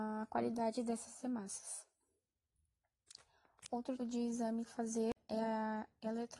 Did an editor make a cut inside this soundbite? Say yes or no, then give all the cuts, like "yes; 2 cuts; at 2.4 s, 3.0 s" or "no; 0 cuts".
yes; 2 cuts; at 4.0 s, 4.7 s